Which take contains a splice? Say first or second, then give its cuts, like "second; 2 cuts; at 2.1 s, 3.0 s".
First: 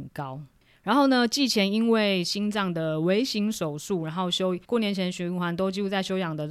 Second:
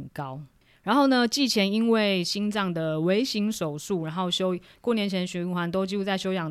first; 1 cut; at 4.6 s